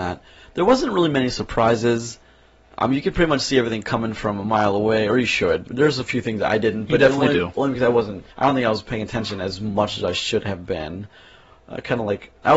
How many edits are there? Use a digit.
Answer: 1